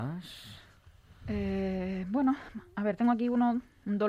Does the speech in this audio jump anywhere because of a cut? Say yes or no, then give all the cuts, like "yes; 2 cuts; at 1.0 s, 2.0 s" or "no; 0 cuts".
no; 0 cuts